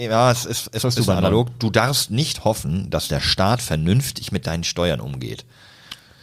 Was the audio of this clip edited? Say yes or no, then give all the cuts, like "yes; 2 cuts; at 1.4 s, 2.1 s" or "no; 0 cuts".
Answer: no; 0 cuts